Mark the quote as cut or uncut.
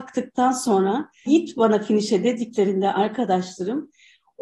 cut